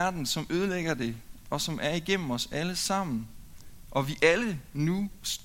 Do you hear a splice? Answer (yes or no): no